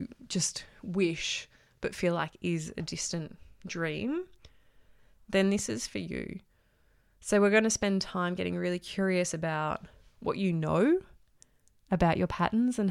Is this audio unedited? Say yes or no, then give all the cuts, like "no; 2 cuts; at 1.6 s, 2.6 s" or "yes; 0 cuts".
yes; 0 cuts